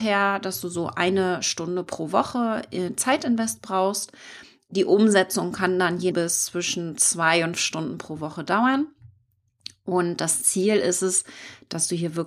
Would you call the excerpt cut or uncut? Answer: cut